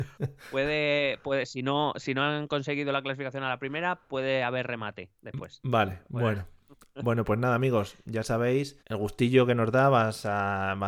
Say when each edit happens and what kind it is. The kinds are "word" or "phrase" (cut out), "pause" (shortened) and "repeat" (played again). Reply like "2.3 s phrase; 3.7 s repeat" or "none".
8.8 s pause